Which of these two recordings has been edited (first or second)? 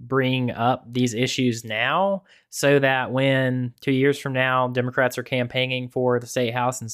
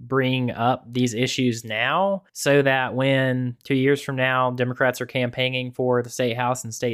second